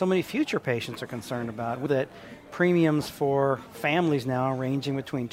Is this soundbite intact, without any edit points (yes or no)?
no